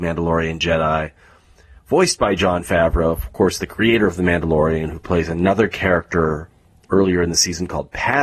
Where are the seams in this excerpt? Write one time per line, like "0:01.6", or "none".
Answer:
none